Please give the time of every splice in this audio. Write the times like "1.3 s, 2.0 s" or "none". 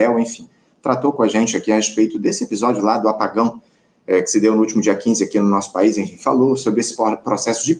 none